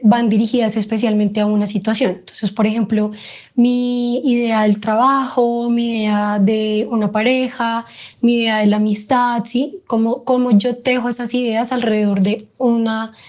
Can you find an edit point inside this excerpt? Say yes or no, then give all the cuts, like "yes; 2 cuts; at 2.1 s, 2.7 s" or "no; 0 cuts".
no; 0 cuts